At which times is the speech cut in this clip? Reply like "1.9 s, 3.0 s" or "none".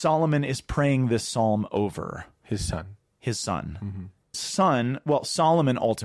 4.3 s